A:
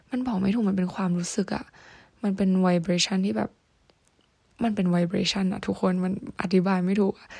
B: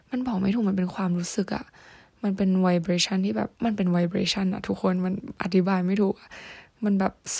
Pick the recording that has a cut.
B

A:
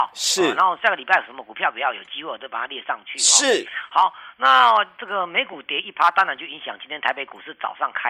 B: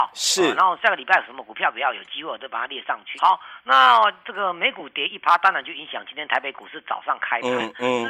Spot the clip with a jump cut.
B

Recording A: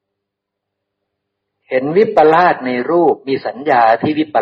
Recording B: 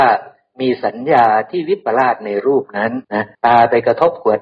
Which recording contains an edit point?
B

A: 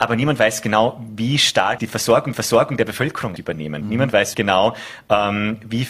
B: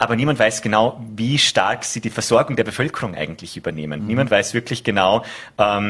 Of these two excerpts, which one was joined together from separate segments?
A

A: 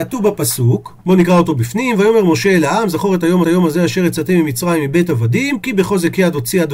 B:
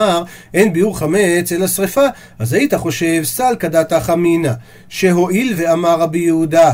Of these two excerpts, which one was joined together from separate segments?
A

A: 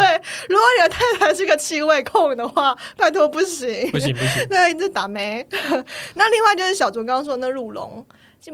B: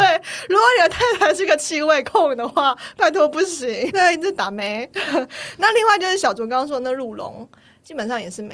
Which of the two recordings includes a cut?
B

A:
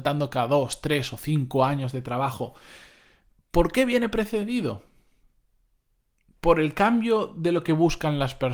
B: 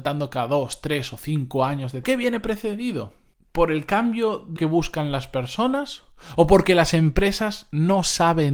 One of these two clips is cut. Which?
B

